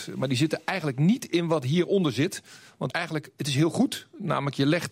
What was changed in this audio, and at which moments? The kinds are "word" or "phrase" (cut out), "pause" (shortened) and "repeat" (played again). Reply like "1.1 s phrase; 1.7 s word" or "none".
2.9 s phrase